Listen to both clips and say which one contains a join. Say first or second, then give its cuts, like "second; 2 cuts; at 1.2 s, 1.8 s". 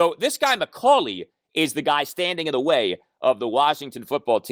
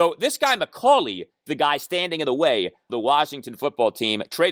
second; 2 cuts; at 1.5 s, 2.9 s